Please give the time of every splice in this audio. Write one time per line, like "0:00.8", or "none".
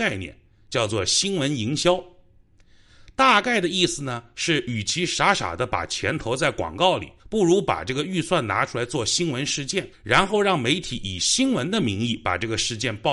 0:07.2
0:09.9